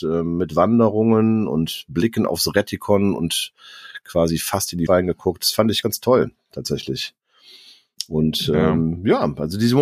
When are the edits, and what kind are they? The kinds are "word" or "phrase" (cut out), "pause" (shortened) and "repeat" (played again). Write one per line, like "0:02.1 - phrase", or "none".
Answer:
0:04.9 - word
0:05.8 - word